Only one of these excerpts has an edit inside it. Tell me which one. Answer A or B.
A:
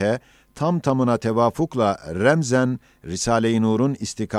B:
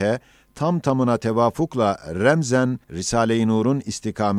B